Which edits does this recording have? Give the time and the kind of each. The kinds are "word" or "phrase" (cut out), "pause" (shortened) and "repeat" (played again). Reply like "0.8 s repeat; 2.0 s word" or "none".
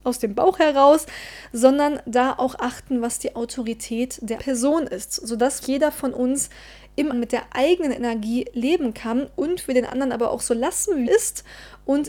4.4 s word; 5.6 s word; 7.1 s word; 11.1 s word